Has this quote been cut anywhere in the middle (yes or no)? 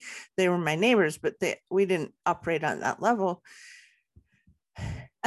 no